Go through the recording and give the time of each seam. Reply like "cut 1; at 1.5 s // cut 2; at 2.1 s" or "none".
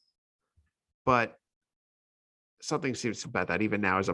cut 1; at 3.2 s